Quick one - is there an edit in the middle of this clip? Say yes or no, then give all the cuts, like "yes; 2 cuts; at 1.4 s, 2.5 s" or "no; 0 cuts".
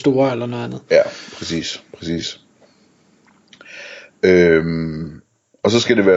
no; 0 cuts